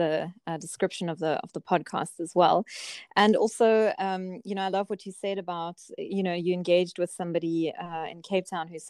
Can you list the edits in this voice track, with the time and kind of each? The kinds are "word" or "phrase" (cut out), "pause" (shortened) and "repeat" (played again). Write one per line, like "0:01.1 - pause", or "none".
none